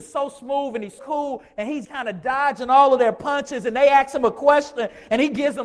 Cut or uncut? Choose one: cut